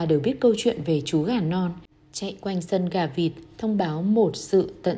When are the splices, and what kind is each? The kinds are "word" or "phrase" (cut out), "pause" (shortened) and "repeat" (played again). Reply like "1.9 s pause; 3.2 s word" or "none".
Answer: 1.9 s pause